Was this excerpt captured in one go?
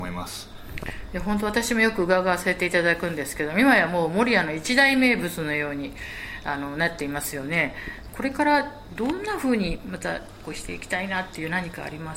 yes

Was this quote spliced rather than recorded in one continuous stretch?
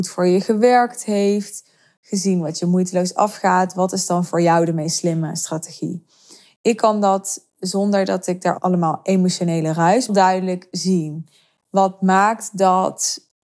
yes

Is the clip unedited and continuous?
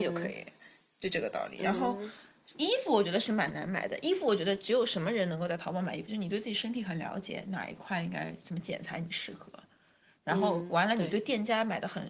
yes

